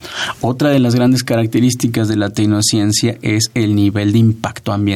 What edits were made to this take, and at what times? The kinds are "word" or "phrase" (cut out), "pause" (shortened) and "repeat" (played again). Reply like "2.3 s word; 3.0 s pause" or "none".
none